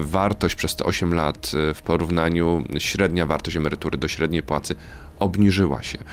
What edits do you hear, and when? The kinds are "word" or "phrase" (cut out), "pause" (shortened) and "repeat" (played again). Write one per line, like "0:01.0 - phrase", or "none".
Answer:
none